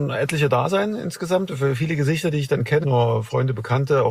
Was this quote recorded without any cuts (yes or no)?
no